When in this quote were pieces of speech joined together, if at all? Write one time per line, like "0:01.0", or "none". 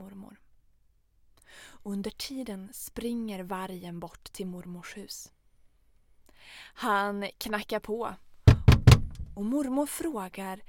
none